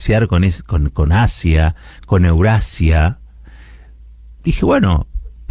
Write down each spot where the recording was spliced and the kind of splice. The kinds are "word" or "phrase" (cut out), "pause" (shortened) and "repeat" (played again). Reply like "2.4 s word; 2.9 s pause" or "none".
4.4 s pause